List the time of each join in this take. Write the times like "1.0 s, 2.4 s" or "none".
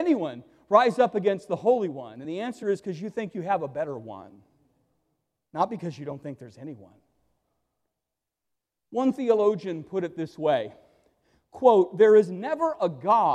none